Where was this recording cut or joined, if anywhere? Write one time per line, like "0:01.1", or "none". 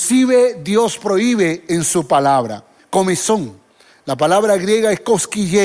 0:02.8